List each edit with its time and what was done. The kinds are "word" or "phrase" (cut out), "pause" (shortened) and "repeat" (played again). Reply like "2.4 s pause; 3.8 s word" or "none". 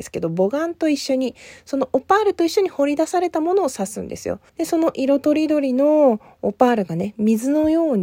4.5 s pause